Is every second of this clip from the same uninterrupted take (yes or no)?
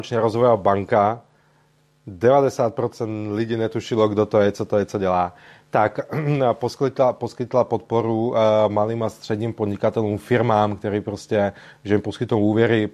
yes